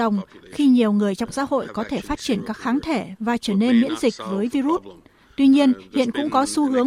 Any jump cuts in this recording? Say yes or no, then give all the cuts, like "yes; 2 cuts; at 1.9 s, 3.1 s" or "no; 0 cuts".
no; 0 cuts